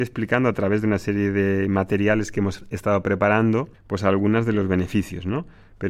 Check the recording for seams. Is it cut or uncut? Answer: cut